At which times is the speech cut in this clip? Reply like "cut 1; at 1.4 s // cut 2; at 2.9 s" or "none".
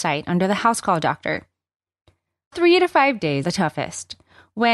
cut 1; at 2.5 s // cut 2; at 3.4 s